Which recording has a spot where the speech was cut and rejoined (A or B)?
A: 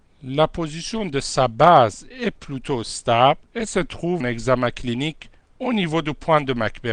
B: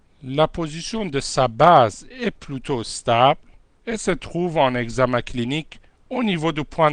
A